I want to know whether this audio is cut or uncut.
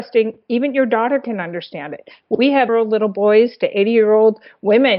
cut